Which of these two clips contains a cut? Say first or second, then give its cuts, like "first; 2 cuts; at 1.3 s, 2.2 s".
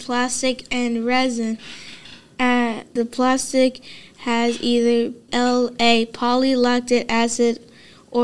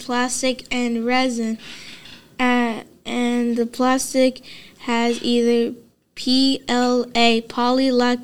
first; 2 cuts; at 3.0 s, 5.3 s